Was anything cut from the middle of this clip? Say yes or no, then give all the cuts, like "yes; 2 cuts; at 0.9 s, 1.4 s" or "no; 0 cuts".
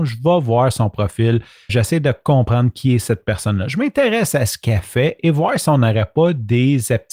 yes; 1 cut; at 1.7 s